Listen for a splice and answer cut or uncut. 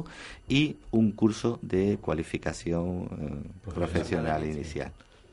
cut